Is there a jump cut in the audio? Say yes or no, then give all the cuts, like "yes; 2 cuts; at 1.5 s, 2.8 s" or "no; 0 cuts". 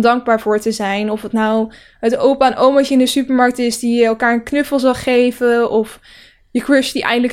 no; 0 cuts